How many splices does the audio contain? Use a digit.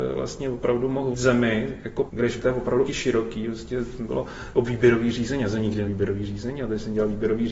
6